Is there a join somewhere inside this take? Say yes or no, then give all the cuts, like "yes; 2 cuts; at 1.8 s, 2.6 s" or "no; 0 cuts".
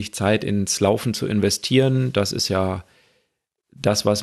no; 0 cuts